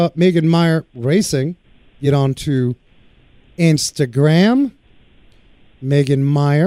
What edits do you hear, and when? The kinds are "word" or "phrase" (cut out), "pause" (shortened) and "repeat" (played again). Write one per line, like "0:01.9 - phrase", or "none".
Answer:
none